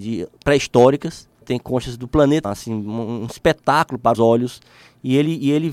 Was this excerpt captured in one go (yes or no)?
no